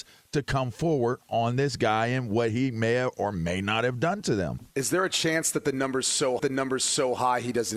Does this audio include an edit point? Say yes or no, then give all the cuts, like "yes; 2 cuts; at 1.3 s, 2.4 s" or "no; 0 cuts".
yes; 2 cuts; at 4.7 s, 6.4 s